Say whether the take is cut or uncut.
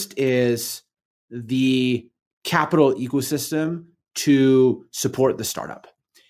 uncut